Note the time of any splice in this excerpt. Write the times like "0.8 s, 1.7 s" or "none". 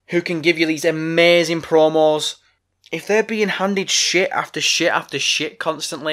2.6 s